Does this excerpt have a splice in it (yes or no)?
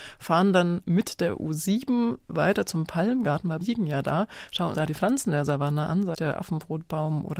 yes